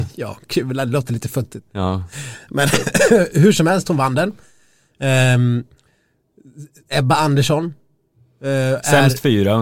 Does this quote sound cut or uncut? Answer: cut